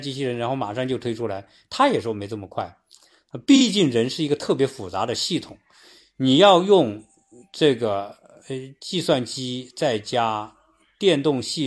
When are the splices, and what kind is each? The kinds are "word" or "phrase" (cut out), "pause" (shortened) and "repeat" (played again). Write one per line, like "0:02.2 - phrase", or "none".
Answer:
none